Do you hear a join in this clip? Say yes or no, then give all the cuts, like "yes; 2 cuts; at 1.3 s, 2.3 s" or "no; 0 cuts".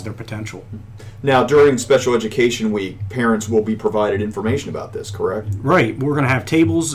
no; 0 cuts